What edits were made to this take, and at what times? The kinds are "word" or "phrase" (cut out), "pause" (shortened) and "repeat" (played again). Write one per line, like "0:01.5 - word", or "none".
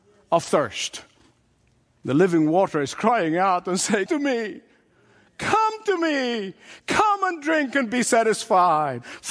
0:04.1 - word